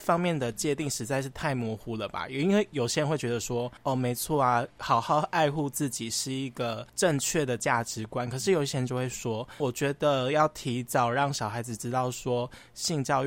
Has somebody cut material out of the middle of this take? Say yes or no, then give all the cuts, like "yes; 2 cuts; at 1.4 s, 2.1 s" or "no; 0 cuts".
yes; 2 cuts; at 3.8 s, 9.6 s